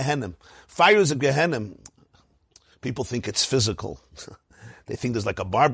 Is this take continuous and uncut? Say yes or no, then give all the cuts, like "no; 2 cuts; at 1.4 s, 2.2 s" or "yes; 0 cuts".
yes; 0 cuts